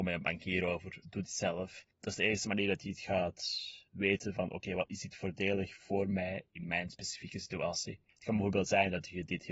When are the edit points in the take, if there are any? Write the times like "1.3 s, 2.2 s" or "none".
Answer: 1.2 s, 3.9 s, 8.1 s